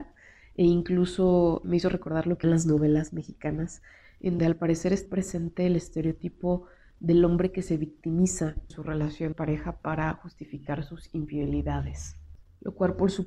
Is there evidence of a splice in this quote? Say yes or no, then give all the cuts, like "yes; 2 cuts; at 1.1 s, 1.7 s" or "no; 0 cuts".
yes; 6 cuts; at 1.6 s, 2.4 s, 4.4 s, 5.1 s, 8.7 s, 9.3 s